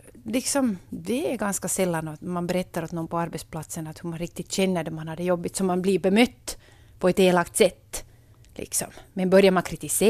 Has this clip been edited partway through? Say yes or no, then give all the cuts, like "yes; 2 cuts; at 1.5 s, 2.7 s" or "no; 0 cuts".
no; 0 cuts